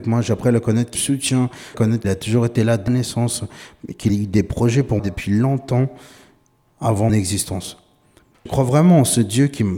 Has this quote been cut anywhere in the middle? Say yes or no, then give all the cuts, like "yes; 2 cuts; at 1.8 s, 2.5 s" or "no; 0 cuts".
yes; 8 cuts; at 0.9 s, 1.7 s, 2.0 s, 2.9 s, 4.1 s, 5.0 s, 7.1 s, 8.5 s